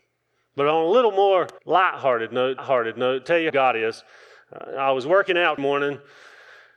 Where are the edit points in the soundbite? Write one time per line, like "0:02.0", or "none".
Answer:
0:01.6
0:02.6
0:03.5
0:05.6